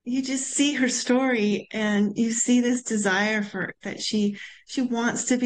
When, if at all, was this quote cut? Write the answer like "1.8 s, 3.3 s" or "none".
none